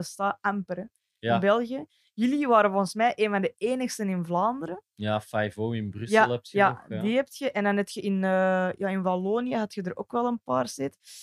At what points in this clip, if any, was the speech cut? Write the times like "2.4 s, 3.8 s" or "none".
none

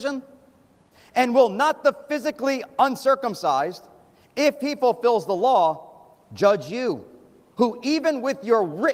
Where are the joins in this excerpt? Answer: none

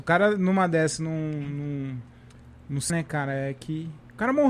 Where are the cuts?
2.9 s

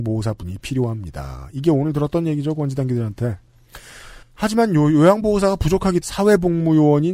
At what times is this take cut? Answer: 4.2 s, 6.0 s

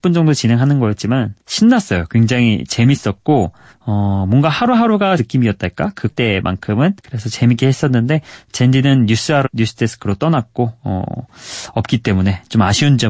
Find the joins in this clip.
1.4 s, 3.7 s, 5.2 s, 6.1 s, 7.0 s, 9.5 s

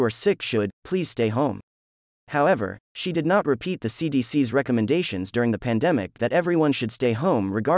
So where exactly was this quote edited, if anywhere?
none

